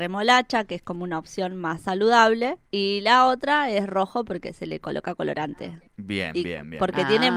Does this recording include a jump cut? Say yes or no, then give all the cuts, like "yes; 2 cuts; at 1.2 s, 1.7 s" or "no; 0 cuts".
yes; 2 cuts; at 2.7 s, 5.9 s